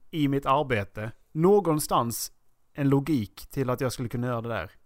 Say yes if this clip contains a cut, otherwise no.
yes